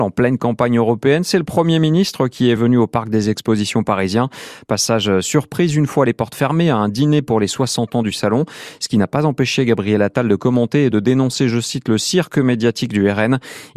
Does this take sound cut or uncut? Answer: uncut